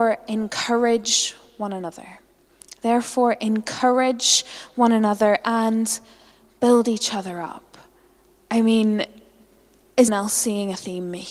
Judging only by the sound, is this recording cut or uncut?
cut